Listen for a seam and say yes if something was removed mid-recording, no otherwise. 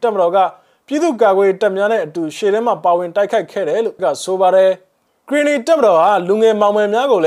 yes